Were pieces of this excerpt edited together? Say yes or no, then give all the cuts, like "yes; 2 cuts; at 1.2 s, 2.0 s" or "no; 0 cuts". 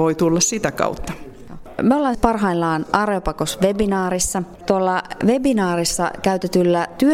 yes; 1 cut; at 2.1 s